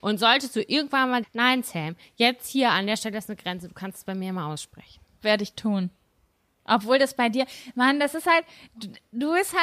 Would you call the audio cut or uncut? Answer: cut